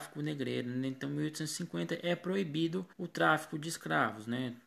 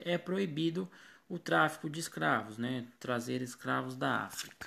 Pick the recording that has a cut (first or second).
first